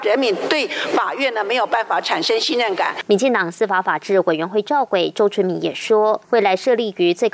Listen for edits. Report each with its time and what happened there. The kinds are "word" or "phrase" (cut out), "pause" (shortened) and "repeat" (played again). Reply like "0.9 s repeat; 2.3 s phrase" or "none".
6.2 s pause